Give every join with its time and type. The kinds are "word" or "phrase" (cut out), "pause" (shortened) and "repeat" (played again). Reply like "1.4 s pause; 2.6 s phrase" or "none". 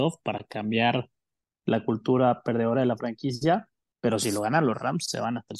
none